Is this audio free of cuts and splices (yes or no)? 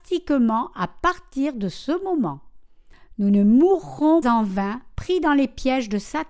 no